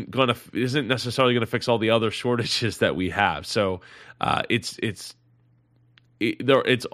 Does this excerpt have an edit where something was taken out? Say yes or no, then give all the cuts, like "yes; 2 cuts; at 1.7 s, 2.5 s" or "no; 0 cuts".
no; 0 cuts